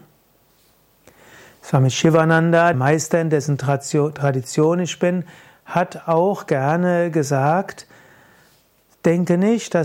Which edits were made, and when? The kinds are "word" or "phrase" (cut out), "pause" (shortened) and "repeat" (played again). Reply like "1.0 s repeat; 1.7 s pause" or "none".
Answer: 2.7 s word